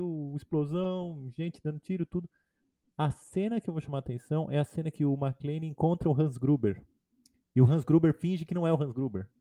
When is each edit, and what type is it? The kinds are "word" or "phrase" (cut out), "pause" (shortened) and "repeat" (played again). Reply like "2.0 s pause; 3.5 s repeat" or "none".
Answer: none